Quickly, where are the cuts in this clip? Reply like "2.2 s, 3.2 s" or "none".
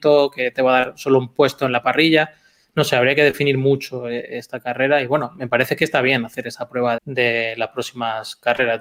7.0 s